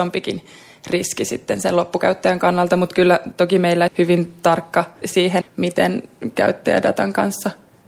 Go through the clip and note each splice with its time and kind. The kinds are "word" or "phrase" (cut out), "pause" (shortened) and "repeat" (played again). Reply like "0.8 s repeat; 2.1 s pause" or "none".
3.9 s phrase; 5.0 s word; 5.4 s word

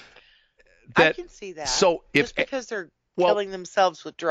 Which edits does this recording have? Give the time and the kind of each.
none

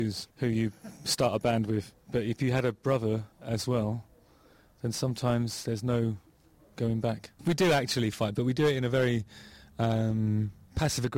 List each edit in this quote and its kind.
3.3 s pause

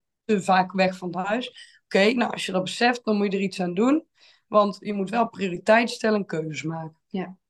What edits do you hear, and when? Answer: none

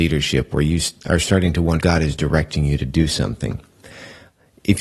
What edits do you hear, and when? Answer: 1.8 s word

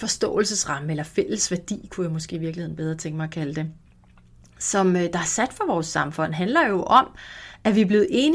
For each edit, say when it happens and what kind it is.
none

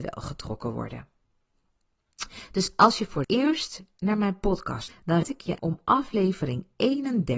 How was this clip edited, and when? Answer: 3.2 s word; 4.9 s word; 5.2 s word; 5.6 s word

